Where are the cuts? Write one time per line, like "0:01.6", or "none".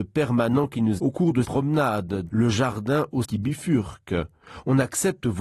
0:01.0
0:01.4
0:02.3
0:03.2